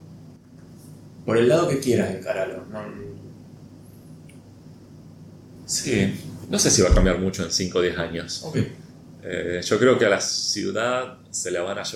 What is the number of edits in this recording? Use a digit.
0